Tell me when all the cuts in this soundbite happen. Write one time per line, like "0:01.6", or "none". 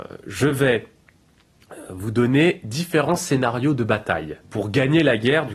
0:04.4